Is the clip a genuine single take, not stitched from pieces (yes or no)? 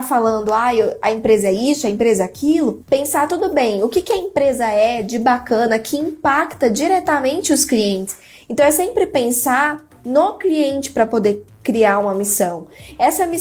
yes